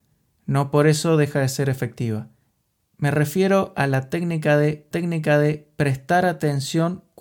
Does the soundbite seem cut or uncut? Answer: cut